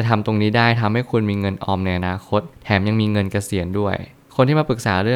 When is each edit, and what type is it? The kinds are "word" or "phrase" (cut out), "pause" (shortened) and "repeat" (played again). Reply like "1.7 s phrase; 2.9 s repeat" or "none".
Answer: none